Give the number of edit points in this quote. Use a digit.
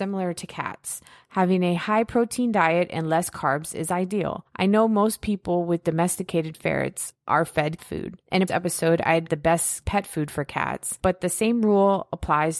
3